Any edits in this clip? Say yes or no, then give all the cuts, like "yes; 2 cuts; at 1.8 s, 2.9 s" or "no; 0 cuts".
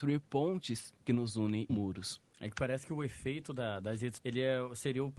yes; 2 cuts; at 1.7 s, 4.2 s